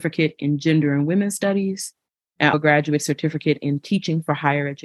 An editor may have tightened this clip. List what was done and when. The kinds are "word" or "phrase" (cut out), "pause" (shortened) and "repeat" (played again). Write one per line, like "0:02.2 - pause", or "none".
0:02.5 - word